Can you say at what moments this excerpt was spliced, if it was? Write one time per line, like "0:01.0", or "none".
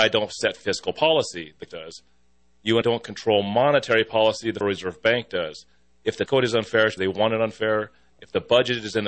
0:01.7
0:02.8
0:04.6
0:06.3
0:07.0

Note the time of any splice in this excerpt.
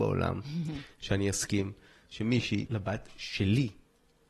0:02.7

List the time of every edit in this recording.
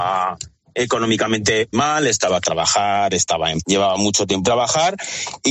0:01.7
0:02.4
0:03.6
0:04.4

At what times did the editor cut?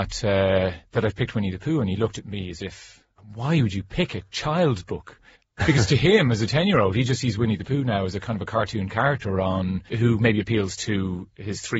0:05.4
0:09.9

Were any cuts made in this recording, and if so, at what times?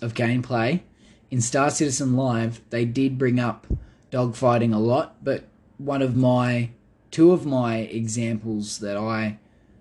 none

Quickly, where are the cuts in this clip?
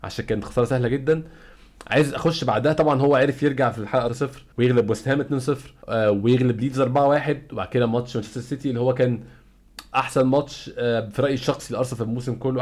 0:04.1
0:04.5
0:05.8

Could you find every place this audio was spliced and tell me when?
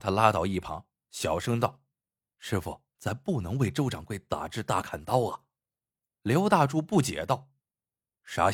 0:01.9
0:02.9
0:05.8
0:07.6

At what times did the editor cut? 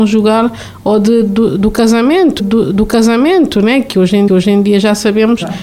0:02.4
0:04.3

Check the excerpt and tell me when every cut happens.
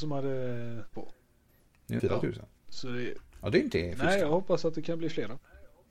0:00.9
0:01.5
0:02.0
0:02.6

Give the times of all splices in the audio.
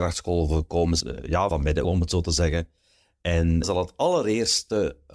0:01.0
0:01.5
0:01.8
0:03.6

